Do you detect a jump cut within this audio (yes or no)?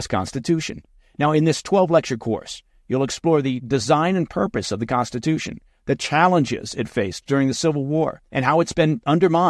yes